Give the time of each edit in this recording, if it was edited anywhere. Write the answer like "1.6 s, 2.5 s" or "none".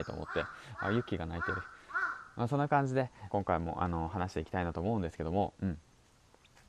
3.3 s